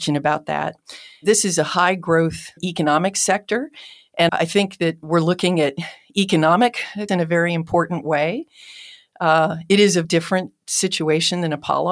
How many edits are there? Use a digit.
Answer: 3